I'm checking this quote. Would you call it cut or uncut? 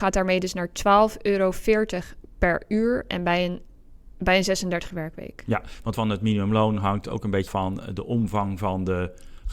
cut